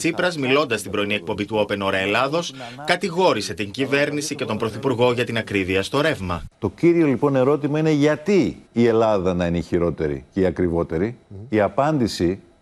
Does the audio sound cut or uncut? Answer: cut